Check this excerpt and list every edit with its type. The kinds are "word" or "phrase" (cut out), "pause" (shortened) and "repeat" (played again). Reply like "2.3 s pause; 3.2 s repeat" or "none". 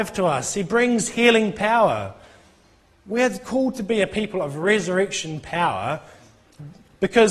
none

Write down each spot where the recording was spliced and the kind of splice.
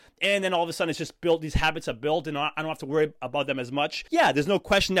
4.1 s pause

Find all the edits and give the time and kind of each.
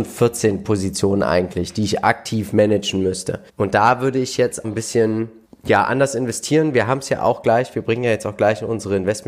3.5 s pause; 4.6 s word; 5.4 s pause

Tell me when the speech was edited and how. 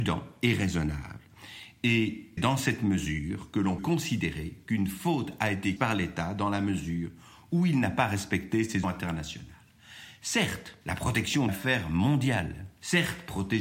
2.4 s word; 3.8 s word; 5.8 s word; 8.8 s word; 10.8 s pause; 11.5 s phrase

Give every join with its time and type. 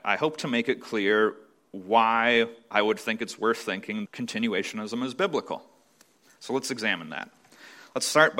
4.1 s phrase

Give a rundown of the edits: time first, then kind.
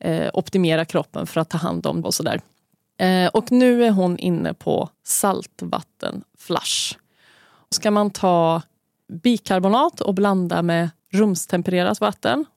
2.0 s phrase; 4.9 s pause; 7.7 s word; 9.1 s word; 11.0 s pause

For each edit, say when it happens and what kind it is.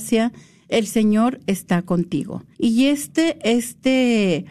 2.5 s pause

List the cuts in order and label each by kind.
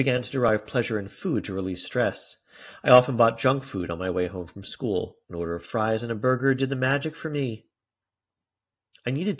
5.2 s pause

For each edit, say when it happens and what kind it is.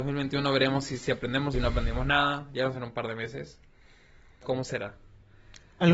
1.5 s word; 2.7 s word; 4.4 s word

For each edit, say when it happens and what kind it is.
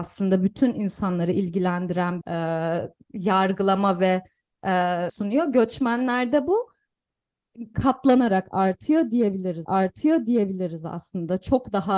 2.2 s word; 5.1 s phrase; 7.7 s word; 9.6 s repeat

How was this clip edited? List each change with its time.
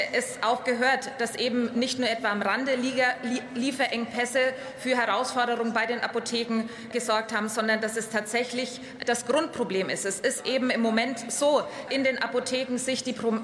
6.9 s word; 11.9 s word

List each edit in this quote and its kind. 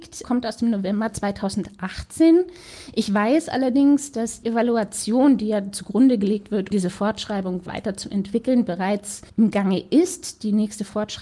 4.4 s word; 6.7 s word; 7.7 s phrase; 9.3 s pause

